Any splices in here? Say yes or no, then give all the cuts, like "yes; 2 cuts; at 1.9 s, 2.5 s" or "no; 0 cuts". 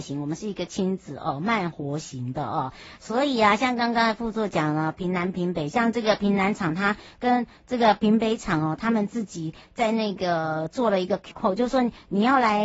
yes; 1 cut; at 11.3 s